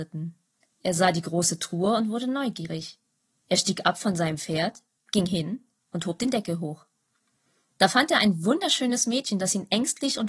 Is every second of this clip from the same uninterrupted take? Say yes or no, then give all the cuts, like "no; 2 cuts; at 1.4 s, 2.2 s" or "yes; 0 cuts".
yes; 0 cuts